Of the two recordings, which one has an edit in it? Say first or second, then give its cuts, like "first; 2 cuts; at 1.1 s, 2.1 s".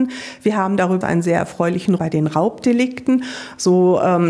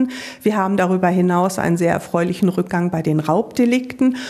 first; 2 cuts; at 1.0 s, 2.0 s